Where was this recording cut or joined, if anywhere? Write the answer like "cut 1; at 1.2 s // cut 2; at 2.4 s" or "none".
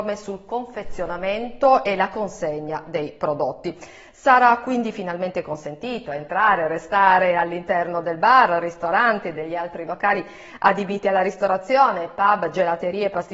none